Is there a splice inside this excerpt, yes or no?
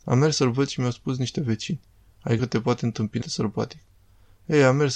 yes